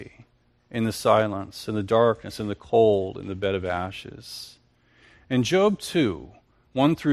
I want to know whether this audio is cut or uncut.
uncut